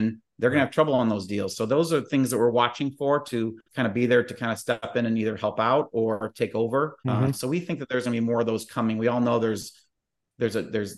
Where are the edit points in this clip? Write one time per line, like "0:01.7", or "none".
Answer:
0:03.6
0:07.0